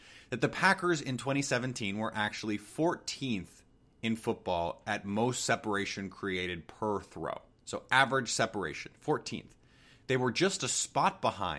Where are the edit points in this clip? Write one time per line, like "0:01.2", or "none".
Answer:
0:03.9
0:07.5